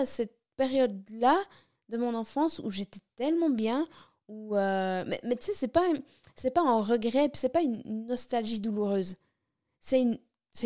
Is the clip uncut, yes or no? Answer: yes